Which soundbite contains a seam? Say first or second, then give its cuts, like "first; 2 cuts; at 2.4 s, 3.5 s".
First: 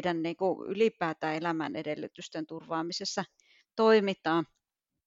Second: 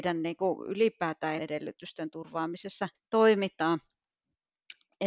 second; 2 cuts; at 1.4 s, 2.9 s